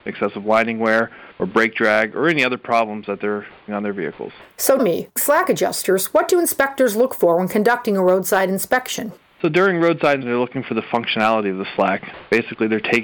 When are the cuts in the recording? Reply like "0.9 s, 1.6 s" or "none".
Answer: 1.3 s, 3.7 s, 4.8 s, 5.2 s, 10.2 s